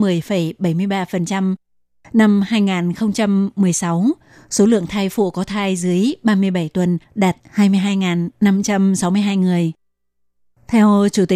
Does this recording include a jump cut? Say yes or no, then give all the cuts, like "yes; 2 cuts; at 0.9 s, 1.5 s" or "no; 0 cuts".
no; 0 cuts